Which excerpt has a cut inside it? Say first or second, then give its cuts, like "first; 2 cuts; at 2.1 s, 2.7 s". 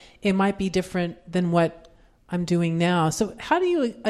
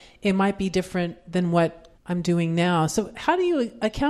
second; 1 cut; at 2.0 s